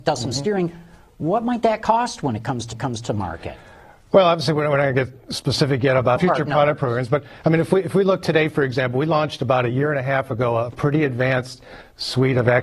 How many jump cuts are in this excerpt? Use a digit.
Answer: 2